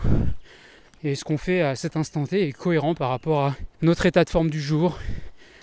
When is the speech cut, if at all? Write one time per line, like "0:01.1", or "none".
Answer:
0:03.7

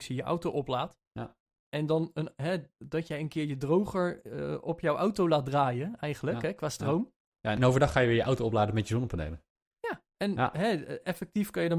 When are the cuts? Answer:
0:01.1
0:07.3

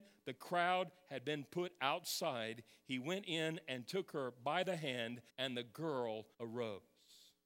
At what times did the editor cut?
0:05.3
0:06.3

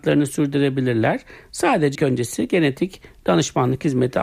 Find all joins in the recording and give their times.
0:02.0

